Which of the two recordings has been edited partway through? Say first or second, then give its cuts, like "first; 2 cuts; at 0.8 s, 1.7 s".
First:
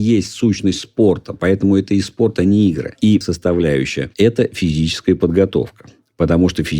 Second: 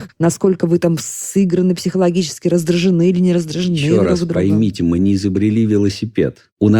first; 1 cut; at 3.2 s